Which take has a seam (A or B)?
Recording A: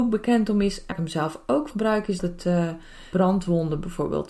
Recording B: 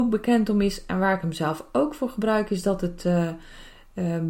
A